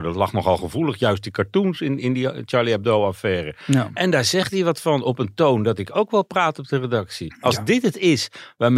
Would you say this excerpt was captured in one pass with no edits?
yes; 0 cuts

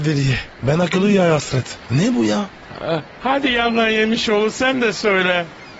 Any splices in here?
no; 0 cuts

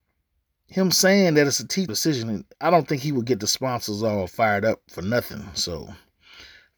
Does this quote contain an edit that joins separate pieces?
yes; 2 cuts; at 1.9 s, 2.5 s

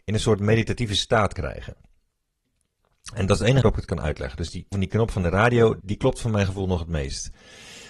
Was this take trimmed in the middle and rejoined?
yes; 4 cuts; at 1.3 s, 3.6 s, 4.7 s, 5.8 s

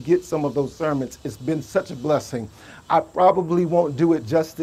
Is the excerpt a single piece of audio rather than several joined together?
yes; 0 cuts

